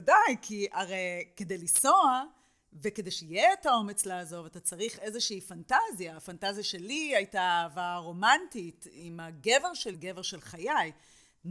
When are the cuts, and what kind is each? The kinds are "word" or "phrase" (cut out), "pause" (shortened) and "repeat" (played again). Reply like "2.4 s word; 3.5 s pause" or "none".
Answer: 9.9 s word